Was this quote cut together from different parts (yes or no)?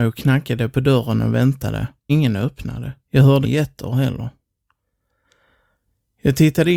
yes